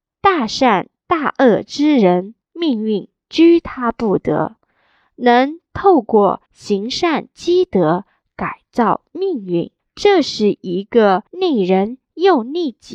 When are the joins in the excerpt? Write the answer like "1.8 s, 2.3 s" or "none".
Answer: 2.4 s, 6.5 s, 9.8 s, 11.3 s